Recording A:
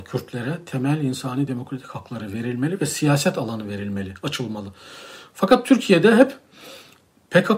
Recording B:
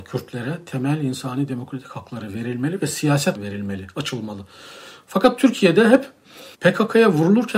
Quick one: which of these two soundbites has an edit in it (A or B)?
B